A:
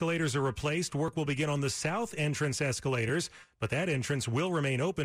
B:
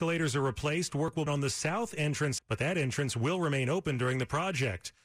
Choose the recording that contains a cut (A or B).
B